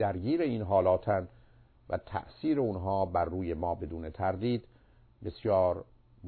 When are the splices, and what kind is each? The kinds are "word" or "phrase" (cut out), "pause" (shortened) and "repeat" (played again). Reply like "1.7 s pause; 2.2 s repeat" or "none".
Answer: none

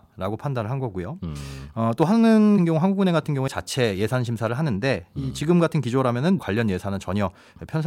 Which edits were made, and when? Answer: 2.6 s word; 3.5 s word; 6.4 s word

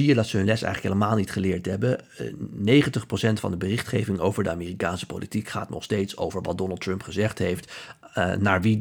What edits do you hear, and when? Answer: none

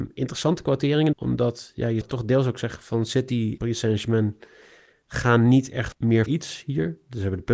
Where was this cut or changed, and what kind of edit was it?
1.1 s word; 2.0 s word; 3.6 s word; 5.9 s word; 6.3 s word

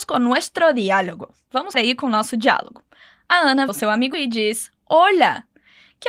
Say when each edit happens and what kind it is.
1.7 s word; 3.7 s word; 4.1 s word; 4.8 s word

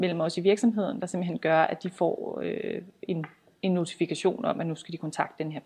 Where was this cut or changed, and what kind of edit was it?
none

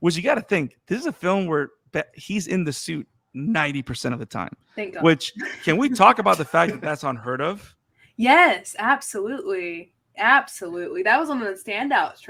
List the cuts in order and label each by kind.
none

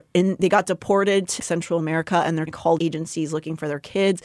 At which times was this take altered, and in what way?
1.4 s word; 2.5 s word; 2.8 s word

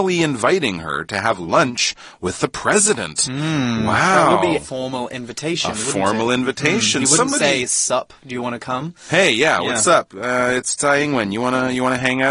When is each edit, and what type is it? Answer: 4.6 s word

